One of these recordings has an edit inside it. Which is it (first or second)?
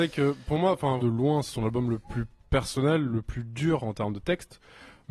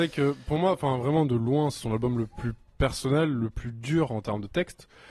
first